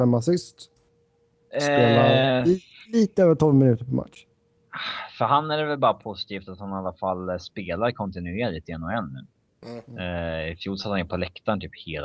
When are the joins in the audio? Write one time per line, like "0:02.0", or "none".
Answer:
none